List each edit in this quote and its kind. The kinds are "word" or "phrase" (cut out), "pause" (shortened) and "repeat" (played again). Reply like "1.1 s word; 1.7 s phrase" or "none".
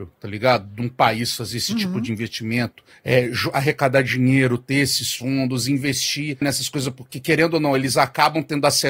6.4 s word